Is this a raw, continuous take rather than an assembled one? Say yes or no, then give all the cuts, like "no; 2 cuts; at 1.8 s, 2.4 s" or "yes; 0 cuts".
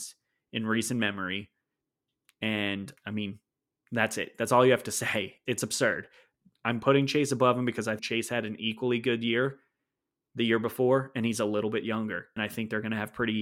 no; 4 cuts; at 3.0 s, 5.5 s, 8.0 s, 12.4 s